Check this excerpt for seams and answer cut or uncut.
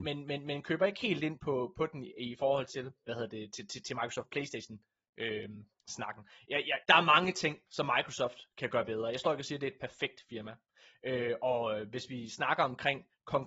cut